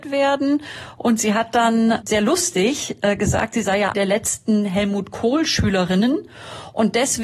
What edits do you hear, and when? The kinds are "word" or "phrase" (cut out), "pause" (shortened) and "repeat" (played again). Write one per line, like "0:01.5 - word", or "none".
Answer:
0:02.0 - word
0:03.9 - word